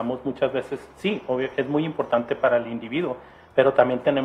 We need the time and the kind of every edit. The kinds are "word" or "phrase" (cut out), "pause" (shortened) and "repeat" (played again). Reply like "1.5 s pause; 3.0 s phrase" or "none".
none

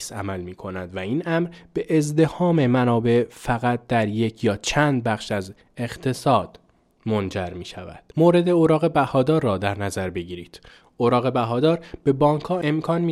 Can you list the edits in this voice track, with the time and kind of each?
none

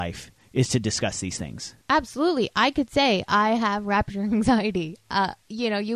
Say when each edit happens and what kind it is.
1.8 s pause

